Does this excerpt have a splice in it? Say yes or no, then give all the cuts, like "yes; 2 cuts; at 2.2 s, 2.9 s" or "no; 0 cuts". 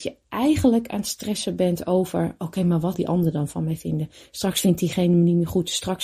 yes; 1 cut; at 2.9 s